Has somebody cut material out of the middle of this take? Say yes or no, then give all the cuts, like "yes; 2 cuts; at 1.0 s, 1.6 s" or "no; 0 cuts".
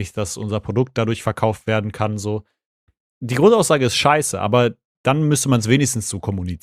no; 0 cuts